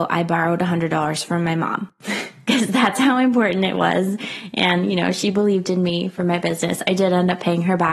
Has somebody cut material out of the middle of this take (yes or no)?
no